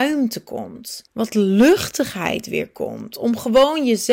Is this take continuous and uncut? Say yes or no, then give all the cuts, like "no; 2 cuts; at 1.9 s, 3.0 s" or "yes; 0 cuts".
no; 1 cut; at 1.1 s